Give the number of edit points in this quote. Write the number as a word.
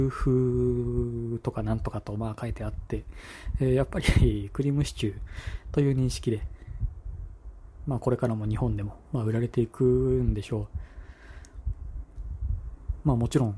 zero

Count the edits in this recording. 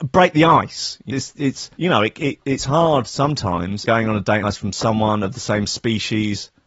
four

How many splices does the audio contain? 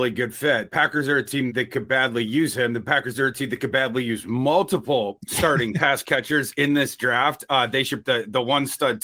two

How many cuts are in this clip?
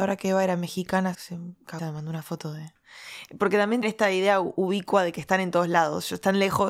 three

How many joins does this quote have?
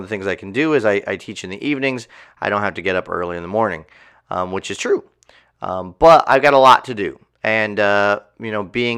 zero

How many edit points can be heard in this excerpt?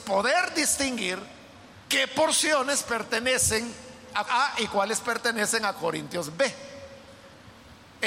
two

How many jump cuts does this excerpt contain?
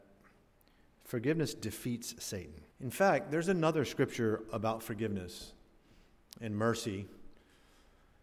one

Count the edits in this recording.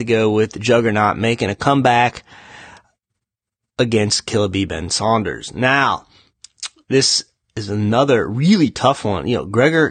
zero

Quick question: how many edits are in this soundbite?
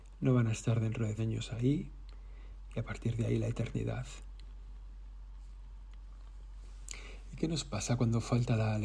one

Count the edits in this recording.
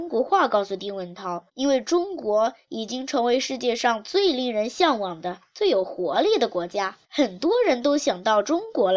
two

